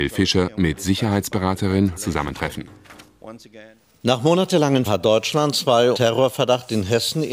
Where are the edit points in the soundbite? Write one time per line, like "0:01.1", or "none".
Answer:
0:01.9
0:04.9
0:05.9